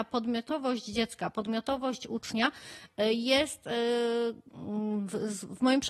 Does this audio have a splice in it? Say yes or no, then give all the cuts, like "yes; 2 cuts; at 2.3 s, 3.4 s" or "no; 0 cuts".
no; 0 cuts